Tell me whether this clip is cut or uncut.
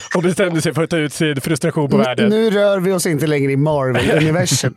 uncut